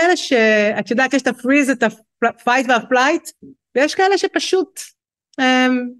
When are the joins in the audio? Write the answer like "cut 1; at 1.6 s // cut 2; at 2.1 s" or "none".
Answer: none